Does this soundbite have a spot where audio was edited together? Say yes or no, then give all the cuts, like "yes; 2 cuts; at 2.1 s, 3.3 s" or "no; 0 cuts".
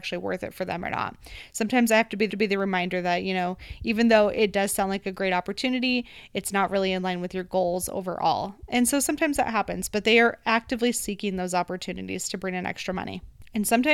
yes; 1 cut; at 2.3 s